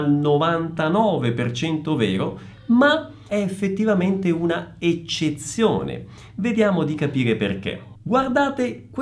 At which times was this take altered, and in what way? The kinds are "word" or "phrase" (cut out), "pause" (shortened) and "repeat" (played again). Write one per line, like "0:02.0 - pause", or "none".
0:03.3 - phrase